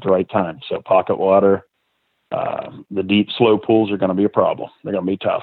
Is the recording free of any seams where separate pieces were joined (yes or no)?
yes